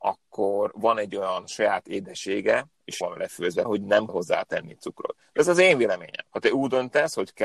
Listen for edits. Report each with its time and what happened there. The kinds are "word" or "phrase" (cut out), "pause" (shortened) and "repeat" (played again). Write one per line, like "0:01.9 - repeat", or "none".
0:03.0 - word
0:03.6 - word
0:04.1 - word
0:06.3 - pause

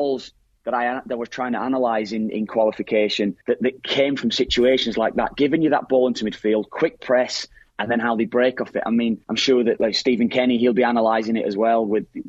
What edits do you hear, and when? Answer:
0:03.4 - pause
0:09.2 - pause

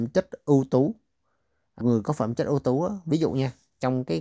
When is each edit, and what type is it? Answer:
0:01.8 - word

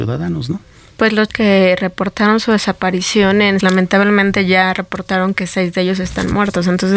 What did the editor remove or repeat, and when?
0:01.3 - word
0:03.6 - word

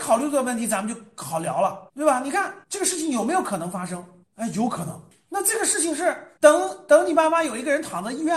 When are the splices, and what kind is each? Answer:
0:01.9 - pause
0:02.6 - pause
0:04.2 - pause
0:06.4 - pause

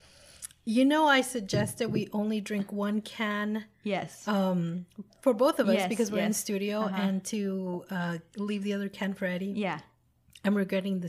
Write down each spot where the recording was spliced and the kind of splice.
none

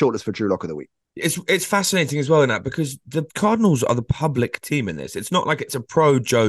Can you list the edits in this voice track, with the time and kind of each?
0:01.0 - pause
0:03.3 - pause

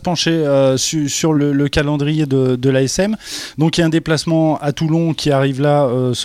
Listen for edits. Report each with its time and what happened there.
0:01.3 - word

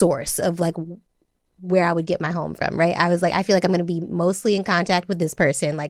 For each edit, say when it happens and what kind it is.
none

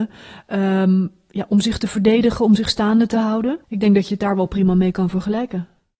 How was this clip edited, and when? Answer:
0:03.6 - pause

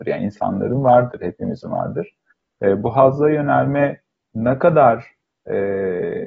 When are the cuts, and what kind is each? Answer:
none

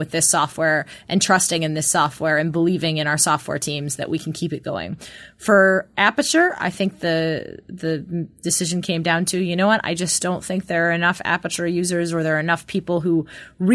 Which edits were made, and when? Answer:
none

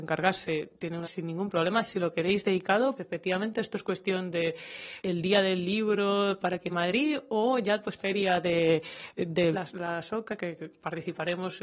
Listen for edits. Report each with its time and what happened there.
0:01.0 - phrase
0:03.0 - word
0:05.0 - word
0:06.7 - phrase
0:08.0 - phrase
0:09.5 - word

